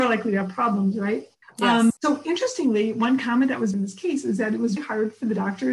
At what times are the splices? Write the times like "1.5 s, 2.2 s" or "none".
1.4 s, 2.0 s, 3.7 s, 4.8 s